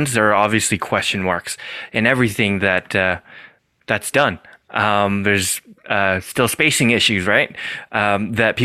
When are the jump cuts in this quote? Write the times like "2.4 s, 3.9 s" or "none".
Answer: none